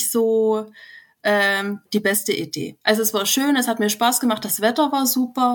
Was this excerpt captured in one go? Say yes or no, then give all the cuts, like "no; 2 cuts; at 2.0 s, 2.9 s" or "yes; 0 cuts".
no; 1 cut; at 2.8 s